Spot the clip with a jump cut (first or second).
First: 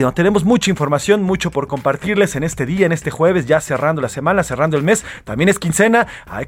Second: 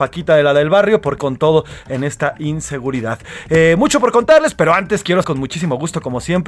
second